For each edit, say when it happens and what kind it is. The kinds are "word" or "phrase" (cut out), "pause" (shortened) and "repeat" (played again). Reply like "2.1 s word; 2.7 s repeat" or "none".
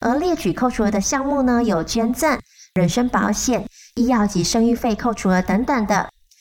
none

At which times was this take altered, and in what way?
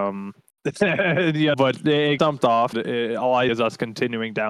1.5 s word; 2.2 s word; 2.7 s word; 3.5 s word

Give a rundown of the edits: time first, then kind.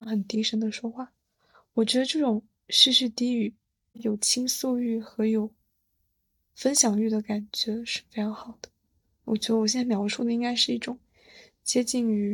none

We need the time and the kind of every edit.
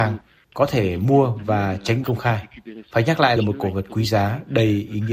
2.0 s word; 3.4 s phrase

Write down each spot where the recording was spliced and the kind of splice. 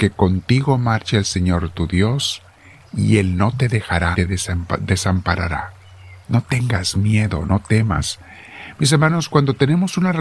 4.1 s word; 6.2 s pause

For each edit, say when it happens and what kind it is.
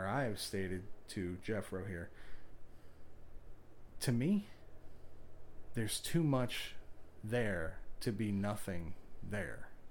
none

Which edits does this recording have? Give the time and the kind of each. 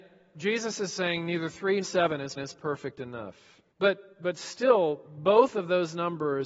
1.8 s word; 2.4 s repeat; 3.7 s pause

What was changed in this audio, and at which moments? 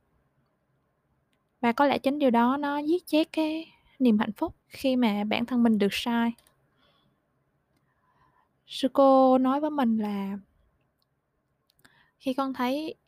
4.6 s pause

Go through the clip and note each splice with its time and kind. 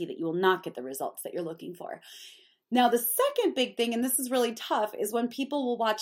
none

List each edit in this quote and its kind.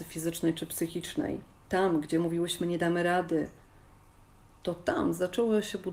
none

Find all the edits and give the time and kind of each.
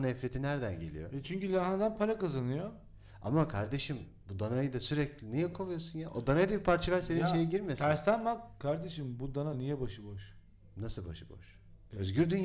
none

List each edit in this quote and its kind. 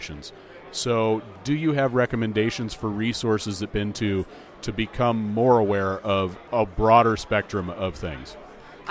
3.7 s phrase

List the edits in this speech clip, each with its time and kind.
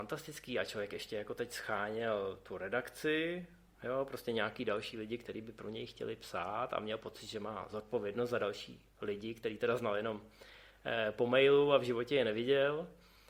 none

